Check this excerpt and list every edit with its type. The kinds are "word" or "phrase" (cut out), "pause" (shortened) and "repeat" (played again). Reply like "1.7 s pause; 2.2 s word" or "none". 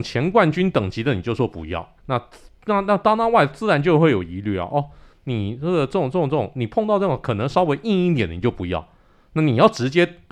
2.0 s pause